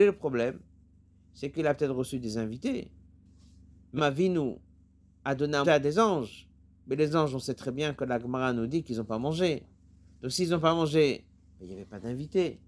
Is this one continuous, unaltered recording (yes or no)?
no